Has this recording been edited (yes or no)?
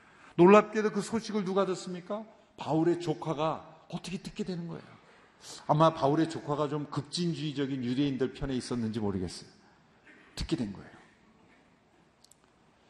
no